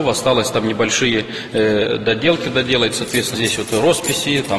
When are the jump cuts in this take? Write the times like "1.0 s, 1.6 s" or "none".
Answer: 3.3 s